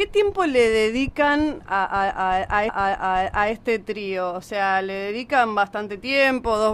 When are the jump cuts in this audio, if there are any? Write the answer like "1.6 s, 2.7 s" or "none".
2.7 s